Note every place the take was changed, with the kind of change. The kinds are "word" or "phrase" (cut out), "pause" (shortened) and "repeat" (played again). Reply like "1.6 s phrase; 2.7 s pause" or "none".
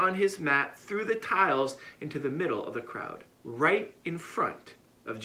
3.3 s pause